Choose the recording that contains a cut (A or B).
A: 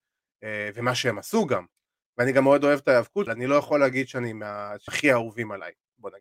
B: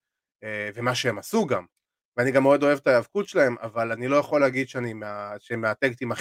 A